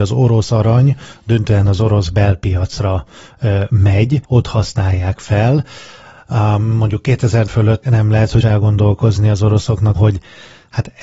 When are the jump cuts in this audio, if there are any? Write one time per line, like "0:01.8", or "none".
0:04.3
0:07.5
0:07.8
0:08.4
0:10.0